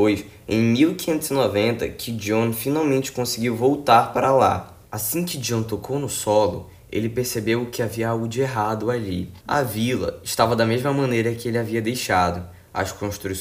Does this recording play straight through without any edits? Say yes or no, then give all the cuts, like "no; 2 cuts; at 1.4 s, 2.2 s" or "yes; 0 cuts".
no; 2 cuts; at 4.9 s, 9.4 s